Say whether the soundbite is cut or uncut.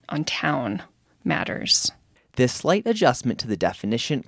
uncut